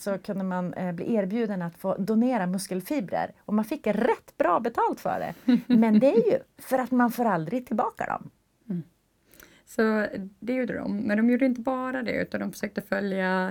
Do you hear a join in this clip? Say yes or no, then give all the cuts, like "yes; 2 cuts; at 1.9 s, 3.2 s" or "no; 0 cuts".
no; 0 cuts